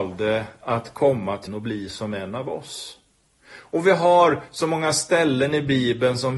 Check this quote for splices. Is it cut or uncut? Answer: cut